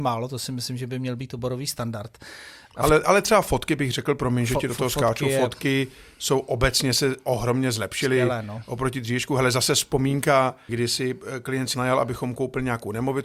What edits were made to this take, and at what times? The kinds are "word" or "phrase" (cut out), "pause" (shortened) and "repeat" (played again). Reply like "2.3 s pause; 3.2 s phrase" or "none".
10.7 s phrase; 11.7 s word